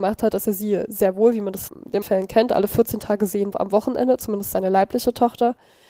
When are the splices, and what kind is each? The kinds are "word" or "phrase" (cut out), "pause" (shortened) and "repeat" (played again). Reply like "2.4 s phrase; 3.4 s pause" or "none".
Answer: 1.7 s word; 2.0 s word; 3.5 s word